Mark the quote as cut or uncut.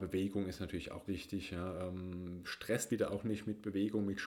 cut